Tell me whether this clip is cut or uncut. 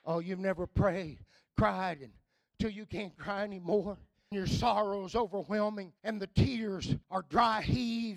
cut